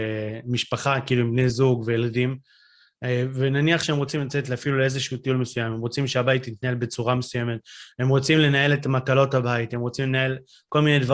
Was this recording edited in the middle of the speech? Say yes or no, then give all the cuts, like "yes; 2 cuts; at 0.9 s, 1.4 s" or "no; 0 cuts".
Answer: no; 0 cuts